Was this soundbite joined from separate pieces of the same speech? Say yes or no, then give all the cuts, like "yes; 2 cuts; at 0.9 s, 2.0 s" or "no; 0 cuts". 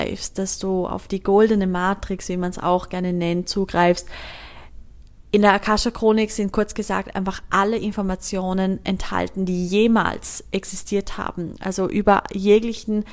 no; 0 cuts